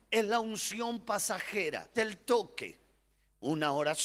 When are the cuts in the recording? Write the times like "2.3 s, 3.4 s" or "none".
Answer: 2.0 s